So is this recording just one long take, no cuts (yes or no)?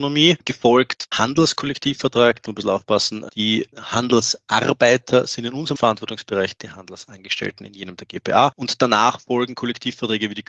no